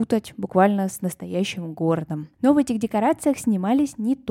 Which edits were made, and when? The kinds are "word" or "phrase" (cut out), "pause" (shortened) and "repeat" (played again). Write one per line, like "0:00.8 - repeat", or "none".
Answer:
0:02.3 - pause